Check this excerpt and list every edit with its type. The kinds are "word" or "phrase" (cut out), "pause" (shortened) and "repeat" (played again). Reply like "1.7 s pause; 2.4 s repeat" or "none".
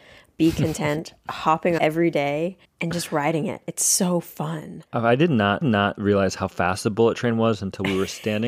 1.8 s phrase; 2.6 s pause; 4.9 s pause; 5.6 s repeat